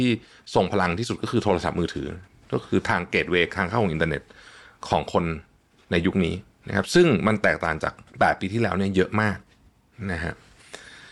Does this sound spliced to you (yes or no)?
no